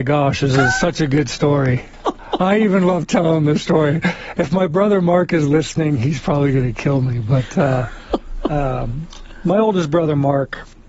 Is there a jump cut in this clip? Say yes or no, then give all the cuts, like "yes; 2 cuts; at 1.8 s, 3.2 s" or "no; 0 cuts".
no; 0 cuts